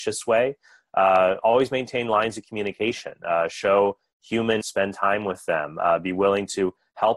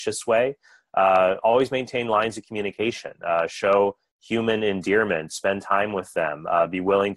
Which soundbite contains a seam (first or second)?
first